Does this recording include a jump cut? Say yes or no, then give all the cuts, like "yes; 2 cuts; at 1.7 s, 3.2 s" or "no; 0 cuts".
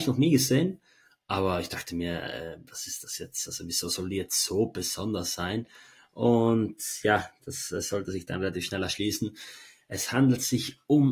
no; 0 cuts